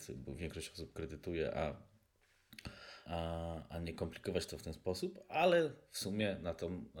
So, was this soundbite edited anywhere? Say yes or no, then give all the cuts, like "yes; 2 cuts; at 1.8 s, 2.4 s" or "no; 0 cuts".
yes; 1 cut; at 3.1 s